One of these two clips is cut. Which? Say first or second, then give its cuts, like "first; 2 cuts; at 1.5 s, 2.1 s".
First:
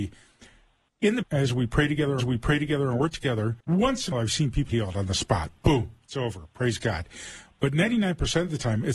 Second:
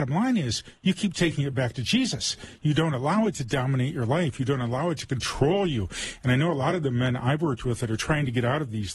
first; 5 cuts; at 1.2 s, 2.2 s, 3.6 s, 4.1 s, 4.7 s